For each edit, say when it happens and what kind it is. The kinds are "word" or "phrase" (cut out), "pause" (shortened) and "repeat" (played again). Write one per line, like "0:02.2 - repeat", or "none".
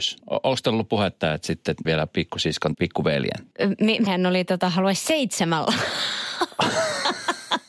0:01.8 - word
0:02.7 - word
0:04.1 - word